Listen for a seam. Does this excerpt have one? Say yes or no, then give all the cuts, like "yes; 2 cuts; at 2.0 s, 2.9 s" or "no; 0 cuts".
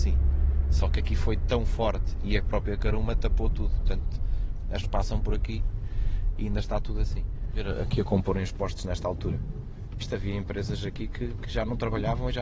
yes; 1 cut; at 4.8 s